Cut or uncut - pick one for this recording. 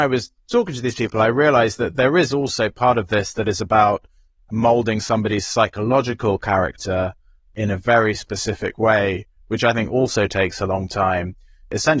uncut